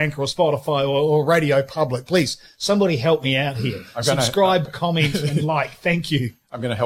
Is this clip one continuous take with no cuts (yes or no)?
yes